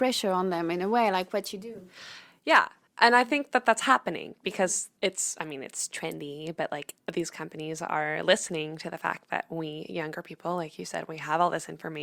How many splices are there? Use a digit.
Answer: 2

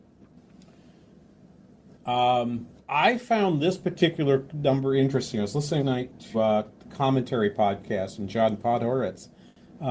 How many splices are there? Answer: 3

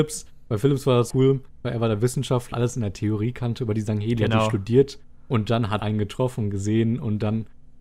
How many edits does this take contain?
3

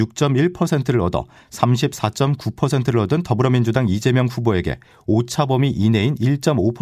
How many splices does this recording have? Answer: 0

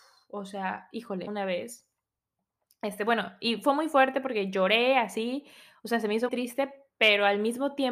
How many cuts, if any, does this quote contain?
2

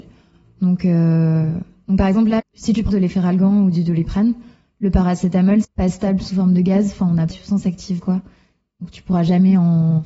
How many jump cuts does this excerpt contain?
5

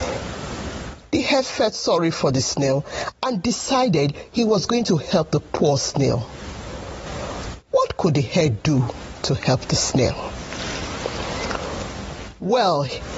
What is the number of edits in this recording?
1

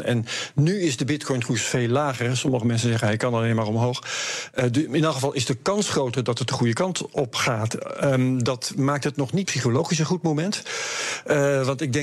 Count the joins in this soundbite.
1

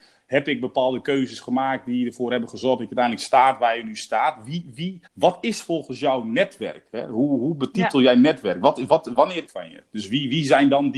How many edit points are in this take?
2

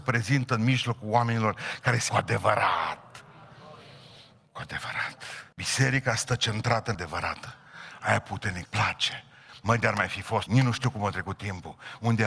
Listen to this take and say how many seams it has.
5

